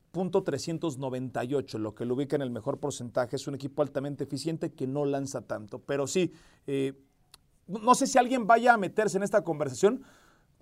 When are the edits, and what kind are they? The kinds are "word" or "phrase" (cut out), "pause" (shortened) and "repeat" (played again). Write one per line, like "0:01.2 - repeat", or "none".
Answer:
none